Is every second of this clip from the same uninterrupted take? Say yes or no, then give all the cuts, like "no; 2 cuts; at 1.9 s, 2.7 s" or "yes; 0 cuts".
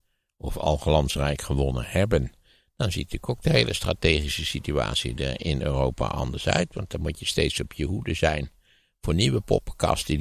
yes; 0 cuts